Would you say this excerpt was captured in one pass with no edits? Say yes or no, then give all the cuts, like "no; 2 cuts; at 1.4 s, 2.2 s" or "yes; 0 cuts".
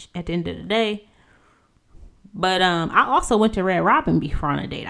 yes; 0 cuts